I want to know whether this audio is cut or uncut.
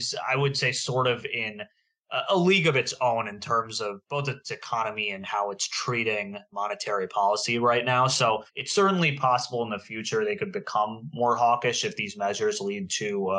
cut